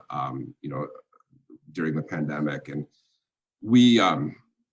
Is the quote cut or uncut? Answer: uncut